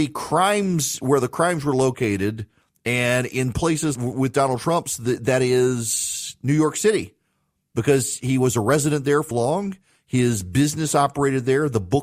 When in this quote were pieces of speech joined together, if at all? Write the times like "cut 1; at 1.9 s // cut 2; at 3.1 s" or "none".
cut 1; at 3.9 s // cut 2; at 9.3 s